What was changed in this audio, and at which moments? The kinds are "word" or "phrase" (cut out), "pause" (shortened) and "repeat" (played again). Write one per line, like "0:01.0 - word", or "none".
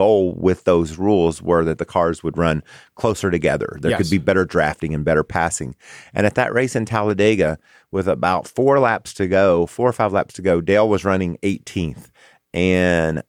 none

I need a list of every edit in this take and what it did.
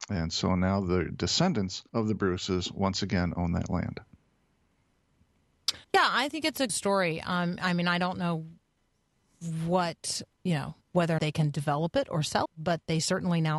0:01.9 - pause
0:05.8 - pause
0:06.7 - phrase
0:10.3 - word
0:10.8 - pause
0:11.2 - word
0:12.4 - word

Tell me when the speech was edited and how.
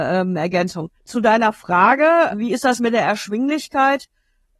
0:01.0 - pause
0:02.3 - word

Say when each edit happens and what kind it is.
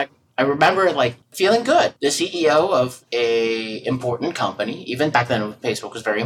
0:01.2 - pause
0:02.0 - pause

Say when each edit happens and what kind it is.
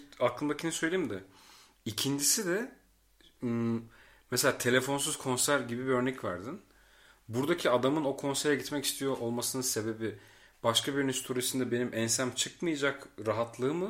none

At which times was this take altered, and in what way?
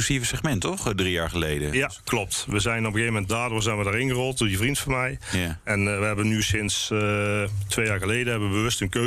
none

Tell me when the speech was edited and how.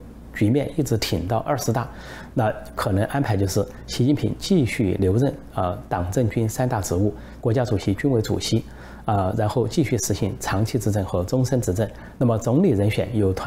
0:07.4 - phrase

